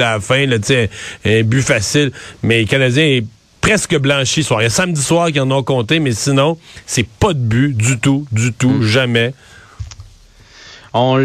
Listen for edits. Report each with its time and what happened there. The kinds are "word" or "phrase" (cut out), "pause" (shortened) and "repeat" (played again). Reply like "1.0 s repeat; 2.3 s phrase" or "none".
4.4 s phrase